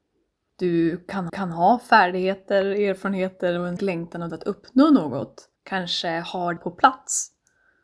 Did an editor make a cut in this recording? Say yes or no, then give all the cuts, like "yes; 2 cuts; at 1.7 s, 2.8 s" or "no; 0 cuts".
yes; 5 cuts; at 1.3 s, 3.8 s, 4.3 s, 5.6 s, 6.6 s